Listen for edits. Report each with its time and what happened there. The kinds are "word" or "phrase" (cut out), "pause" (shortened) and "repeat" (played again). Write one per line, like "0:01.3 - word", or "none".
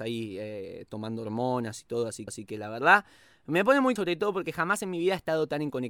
0:02.3 - repeat
0:04.0 - word